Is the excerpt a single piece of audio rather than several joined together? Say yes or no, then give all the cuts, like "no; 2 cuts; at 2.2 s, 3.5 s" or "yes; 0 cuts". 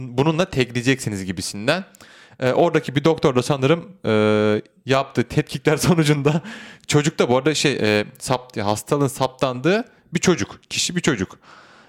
yes; 0 cuts